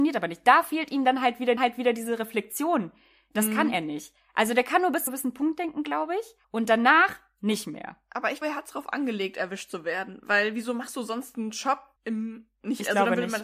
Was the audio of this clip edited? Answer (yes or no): yes